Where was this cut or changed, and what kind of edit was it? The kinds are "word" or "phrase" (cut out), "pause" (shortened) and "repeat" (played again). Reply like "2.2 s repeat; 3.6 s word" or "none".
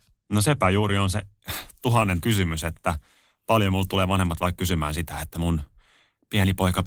2.2 s word